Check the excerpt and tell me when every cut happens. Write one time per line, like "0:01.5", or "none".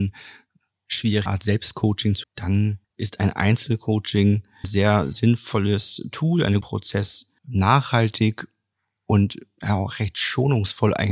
0:01.3
0:02.2
0:02.8
0:04.6
0:06.6
0:07.4